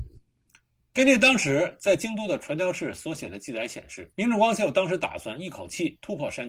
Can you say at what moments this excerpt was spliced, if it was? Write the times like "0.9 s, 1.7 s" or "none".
4.1 s